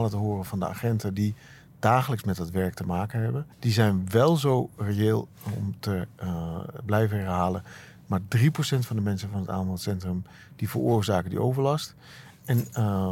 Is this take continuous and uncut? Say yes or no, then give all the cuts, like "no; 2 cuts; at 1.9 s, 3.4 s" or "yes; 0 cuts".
no; 1 cut; at 3.5 s